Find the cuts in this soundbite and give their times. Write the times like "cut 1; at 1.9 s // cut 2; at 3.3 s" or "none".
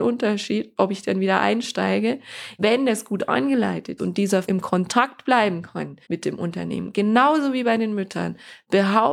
cut 1; at 2.6 s // cut 2; at 4.0 s // cut 3; at 4.4 s // cut 4; at 6.0 s